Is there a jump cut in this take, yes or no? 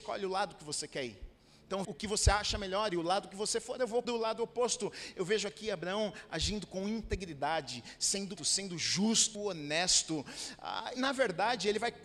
yes